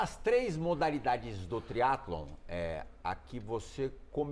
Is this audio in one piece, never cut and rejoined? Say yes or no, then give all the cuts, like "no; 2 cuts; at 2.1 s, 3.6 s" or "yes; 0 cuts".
yes; 0 cuts